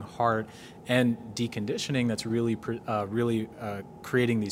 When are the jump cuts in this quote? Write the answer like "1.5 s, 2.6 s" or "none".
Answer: none